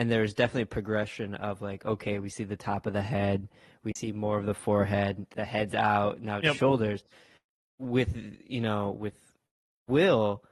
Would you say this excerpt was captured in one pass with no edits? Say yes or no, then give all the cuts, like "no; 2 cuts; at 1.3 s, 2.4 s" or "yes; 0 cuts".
yes; 0 cuts